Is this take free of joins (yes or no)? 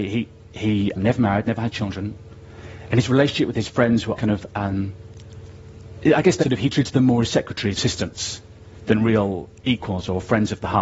no